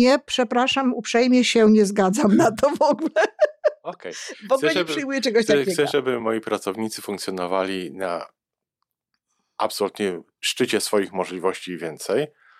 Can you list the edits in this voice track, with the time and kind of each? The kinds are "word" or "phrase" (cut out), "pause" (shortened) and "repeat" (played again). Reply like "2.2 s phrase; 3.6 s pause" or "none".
none